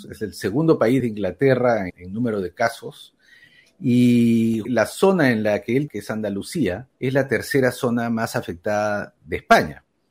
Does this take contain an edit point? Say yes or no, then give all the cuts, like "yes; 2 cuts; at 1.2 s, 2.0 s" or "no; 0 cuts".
yes; 5 cuts; at 1.0 s, 1.9 s, 4.6 s, 5.9 s, 6.9 s